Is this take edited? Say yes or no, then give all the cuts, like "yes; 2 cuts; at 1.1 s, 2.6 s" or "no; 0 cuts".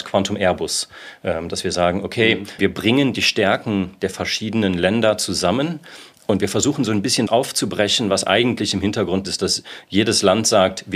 yes; 3 cuts; at 2.6 s, 7.3 s, 9.2 s